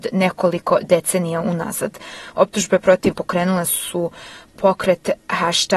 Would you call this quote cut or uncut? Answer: cut